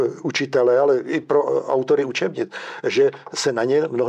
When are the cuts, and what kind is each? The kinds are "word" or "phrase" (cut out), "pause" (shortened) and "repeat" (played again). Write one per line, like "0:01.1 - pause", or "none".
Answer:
none

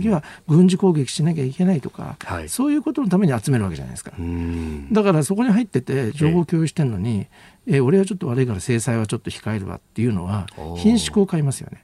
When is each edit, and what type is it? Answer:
none

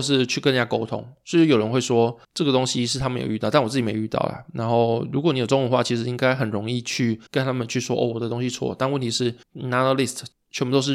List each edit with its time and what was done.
0:02.2 - pause
0:07.3 - pause
0:09.4 - pause

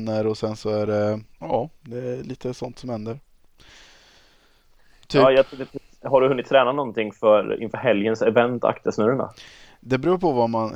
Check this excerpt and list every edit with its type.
0:01.3 - pause

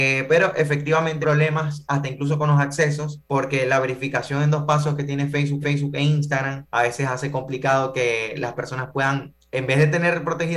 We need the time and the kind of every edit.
0:01.2 - phrase
0:03.3 - pause
0:05.6 - repeat
0:06.7 - pause

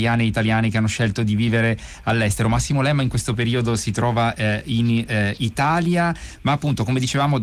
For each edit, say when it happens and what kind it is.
none

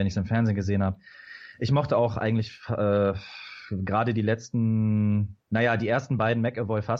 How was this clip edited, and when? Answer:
0:05.4 - pause

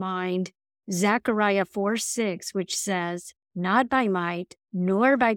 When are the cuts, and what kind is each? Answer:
0:03.4 - pause

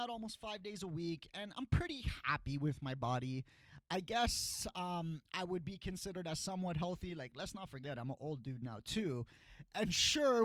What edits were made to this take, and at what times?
none

